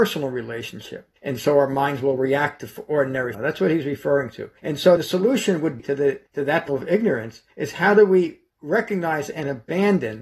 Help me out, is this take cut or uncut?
cut